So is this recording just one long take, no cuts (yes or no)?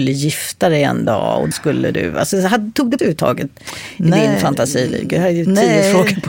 no